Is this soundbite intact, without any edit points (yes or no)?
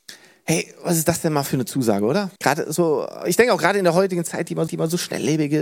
no